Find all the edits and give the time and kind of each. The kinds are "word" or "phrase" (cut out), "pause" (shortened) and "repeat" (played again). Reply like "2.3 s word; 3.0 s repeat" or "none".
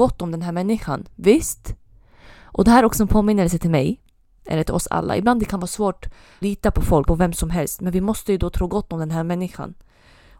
6.4 s word; 7.1 s word